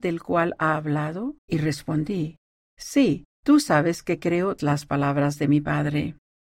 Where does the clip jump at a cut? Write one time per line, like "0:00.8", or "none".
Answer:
0:01.4
0:03.3
0:04.6